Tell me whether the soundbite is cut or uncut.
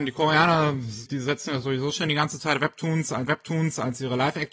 cut